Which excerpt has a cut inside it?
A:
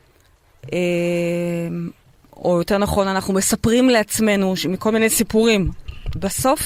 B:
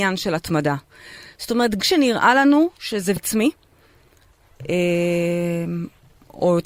B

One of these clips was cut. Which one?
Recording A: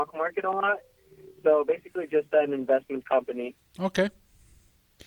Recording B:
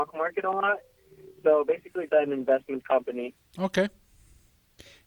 B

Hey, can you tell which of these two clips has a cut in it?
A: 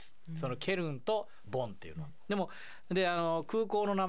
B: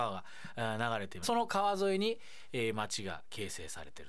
B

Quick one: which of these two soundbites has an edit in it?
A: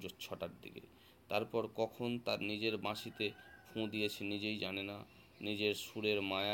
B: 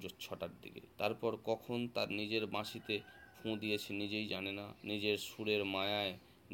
B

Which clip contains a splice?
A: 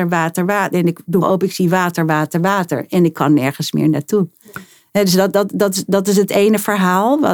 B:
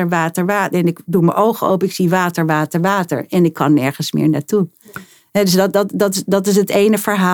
A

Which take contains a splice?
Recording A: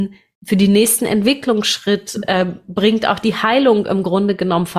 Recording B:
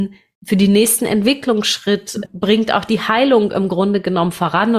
B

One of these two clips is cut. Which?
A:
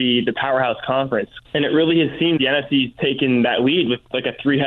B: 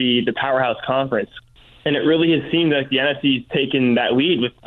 A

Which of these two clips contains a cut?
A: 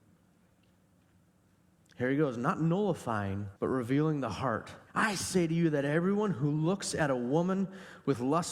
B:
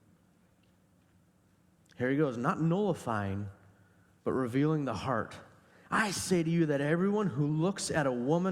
A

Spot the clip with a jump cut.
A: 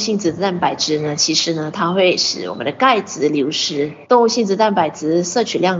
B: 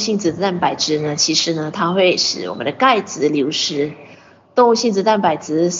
A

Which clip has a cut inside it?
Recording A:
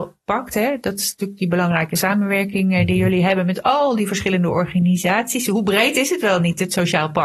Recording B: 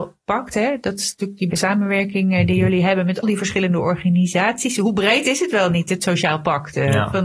B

